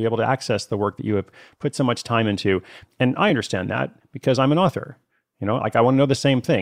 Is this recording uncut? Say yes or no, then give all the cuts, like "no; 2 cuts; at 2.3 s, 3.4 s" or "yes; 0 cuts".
yes; 0 cuts